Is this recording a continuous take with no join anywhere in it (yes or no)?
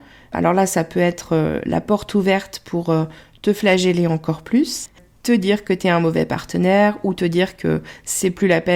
yes